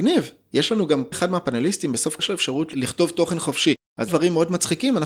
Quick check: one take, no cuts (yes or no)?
no